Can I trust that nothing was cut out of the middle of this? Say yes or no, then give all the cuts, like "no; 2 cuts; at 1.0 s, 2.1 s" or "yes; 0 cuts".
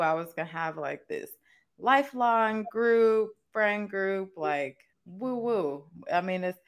no; 1 cut; at 4.9 s